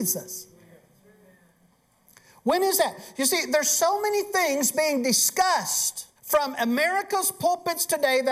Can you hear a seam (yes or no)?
yes